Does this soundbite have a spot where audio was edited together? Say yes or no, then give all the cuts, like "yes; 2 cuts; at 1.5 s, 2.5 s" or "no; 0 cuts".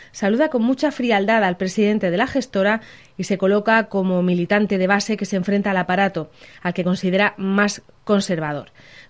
no; 0 cuts